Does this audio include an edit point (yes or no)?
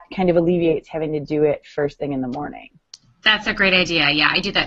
no